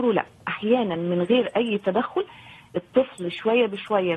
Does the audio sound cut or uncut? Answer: uncut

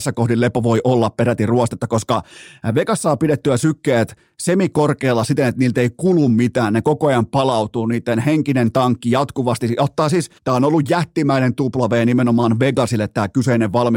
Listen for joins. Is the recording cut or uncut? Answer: cut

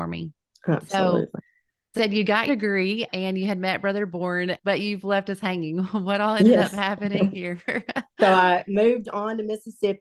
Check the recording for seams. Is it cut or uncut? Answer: cut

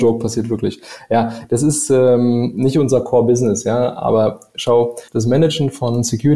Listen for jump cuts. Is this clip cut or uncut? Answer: cut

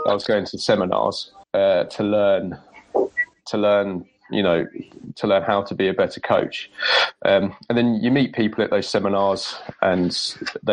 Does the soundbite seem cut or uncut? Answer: cut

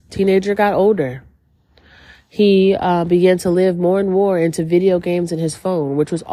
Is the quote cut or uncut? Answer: uncut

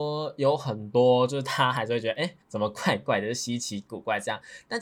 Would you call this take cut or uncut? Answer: cut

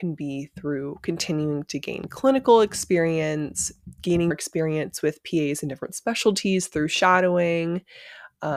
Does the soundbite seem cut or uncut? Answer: cut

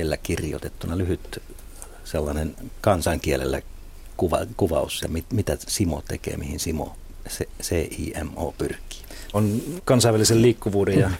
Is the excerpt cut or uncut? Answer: cut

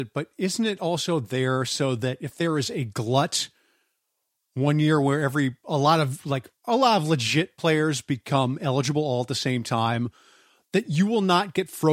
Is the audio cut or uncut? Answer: uncut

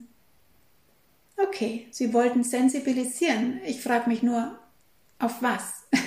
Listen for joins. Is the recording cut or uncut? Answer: uncut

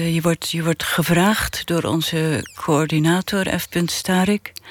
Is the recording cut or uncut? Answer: uncut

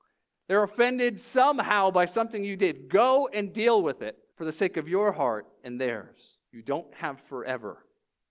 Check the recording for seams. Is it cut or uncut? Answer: cut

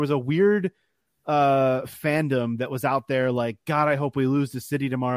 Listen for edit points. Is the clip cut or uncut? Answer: uncut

